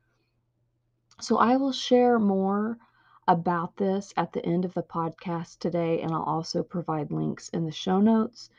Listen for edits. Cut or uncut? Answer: uncut